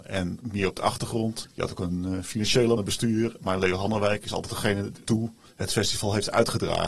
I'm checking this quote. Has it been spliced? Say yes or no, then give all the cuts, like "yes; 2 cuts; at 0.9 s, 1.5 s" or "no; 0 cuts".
yes; 2 cuts; at 2.8 s, 5.0 s